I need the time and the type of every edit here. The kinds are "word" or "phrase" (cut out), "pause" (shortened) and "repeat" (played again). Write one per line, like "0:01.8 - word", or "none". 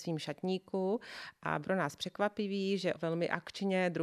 0:01.6 - word
0:03.0 - word

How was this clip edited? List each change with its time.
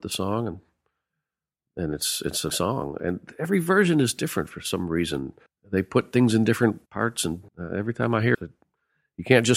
0:02.5 - word
0:05.5 - pause
0:06.9 - pause
0:07.5 - pause
0:08.3 - phrase

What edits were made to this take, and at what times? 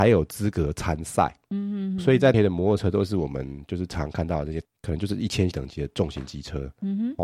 0:02.3 - word
0:05.5 - word

